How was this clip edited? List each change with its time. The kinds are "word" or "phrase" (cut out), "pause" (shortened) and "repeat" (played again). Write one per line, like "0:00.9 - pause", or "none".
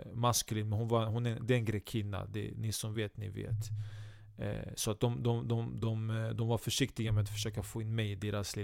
none